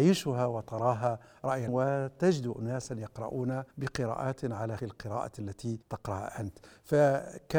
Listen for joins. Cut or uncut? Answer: cut